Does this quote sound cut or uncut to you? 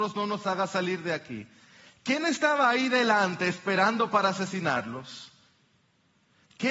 uncut